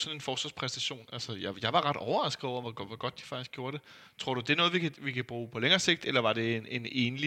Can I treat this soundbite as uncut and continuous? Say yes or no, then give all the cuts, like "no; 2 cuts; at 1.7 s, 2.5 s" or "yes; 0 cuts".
yes; 0 cuts